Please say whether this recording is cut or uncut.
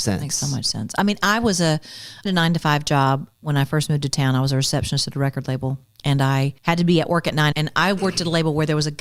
cut